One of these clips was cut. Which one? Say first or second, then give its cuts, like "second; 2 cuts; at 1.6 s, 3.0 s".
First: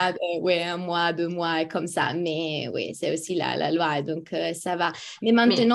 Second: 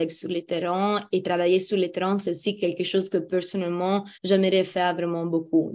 second; 1 cut; at 4.2 s